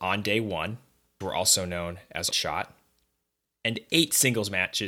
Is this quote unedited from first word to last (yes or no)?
no